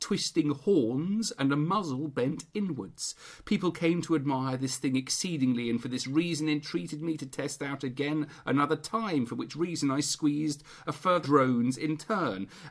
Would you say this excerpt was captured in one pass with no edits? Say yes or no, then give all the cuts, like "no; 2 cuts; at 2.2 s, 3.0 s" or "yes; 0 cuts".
no; 1 cut; at 11.2 s